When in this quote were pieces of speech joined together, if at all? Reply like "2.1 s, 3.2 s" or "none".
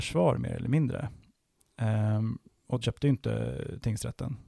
2.8 s